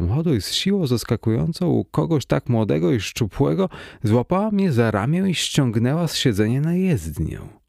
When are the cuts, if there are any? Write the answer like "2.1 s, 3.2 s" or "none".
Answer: none